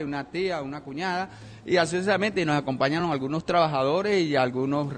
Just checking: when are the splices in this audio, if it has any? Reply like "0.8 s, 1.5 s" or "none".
none